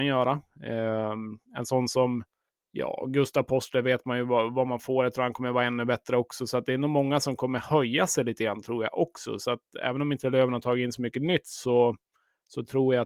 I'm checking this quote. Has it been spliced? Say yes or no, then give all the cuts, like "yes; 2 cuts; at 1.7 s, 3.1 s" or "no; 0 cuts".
no; 0 cuts